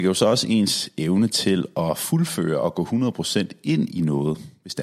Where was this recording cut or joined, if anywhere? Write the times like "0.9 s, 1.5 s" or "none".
none